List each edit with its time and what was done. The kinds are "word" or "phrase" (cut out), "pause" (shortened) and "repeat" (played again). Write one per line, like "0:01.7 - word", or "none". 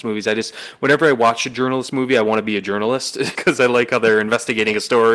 0:03.3 - word